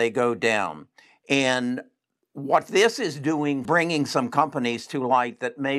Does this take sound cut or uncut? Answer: cut